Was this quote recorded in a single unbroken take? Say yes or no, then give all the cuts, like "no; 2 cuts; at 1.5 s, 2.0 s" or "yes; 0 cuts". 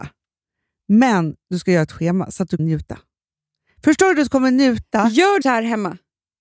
no; 2 cuts; at 2.6 s, 5.4 s